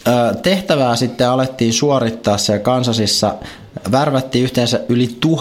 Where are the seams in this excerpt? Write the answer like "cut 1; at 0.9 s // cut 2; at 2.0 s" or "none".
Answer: none